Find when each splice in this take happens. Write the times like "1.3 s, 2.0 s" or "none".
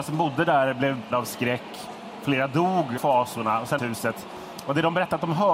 1.1 s, 3.0 s, 3.8 s